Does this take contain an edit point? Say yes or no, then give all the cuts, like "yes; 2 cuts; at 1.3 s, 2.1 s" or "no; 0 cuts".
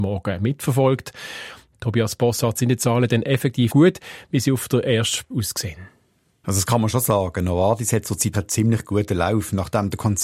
yes; 3 cuts; at 3.7 s, 5.3 s, 8.3 s